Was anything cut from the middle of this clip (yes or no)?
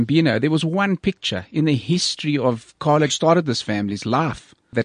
yes